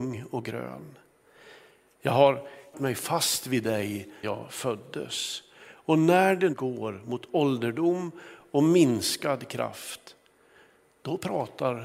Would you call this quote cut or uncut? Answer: cut